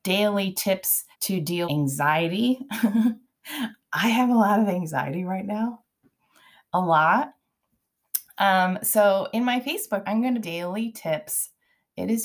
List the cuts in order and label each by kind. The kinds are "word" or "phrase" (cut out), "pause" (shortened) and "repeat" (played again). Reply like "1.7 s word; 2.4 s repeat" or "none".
1.1 s pause; 1.6 s word; 10.0 s word; 10.4 s phrase